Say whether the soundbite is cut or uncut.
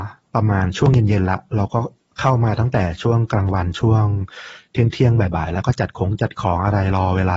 uncut